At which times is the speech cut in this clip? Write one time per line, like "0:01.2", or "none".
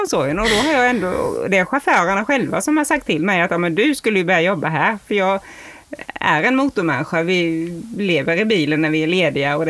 none